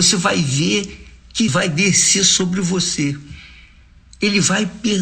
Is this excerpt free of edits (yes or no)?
no